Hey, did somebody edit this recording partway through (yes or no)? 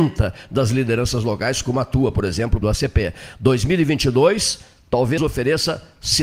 yes